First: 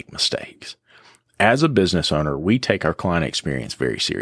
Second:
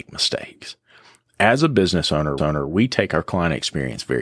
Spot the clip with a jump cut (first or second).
second